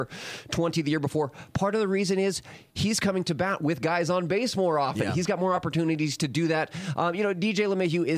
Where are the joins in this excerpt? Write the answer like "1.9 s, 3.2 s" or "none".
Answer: none